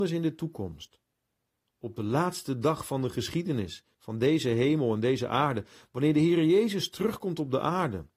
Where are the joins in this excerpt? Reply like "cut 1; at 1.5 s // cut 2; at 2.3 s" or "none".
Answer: cut 1; at 3.9 s